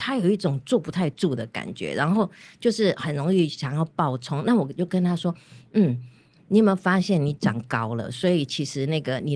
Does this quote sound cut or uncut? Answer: uncut